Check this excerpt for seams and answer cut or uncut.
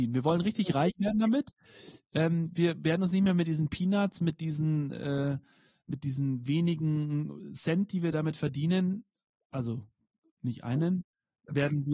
uncut